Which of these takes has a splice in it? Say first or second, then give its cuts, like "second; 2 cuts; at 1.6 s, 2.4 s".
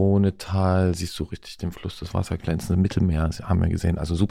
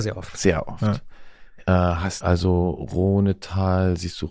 second; 1 cut; at 2.2 s